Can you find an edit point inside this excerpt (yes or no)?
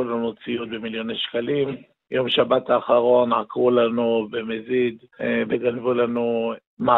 no